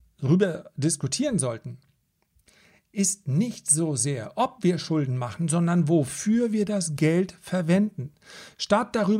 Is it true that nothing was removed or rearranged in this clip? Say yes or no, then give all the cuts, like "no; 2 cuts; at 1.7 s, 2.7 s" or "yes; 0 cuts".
yes; 0 cuts